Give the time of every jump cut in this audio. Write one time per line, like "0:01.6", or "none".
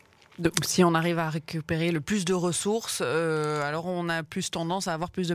none